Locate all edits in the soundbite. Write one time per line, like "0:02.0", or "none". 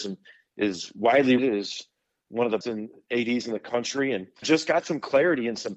0:01.4
0:02.6
0:04.4